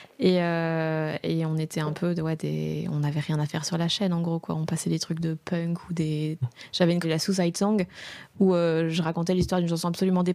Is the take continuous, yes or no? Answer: no